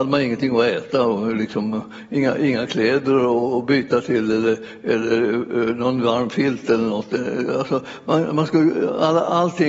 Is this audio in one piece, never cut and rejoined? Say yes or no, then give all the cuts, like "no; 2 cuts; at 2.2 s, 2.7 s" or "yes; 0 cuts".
yes; 0 cuts